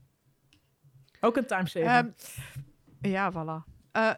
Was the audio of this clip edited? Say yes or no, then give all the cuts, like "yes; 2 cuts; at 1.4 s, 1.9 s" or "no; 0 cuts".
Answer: no; 0 cuts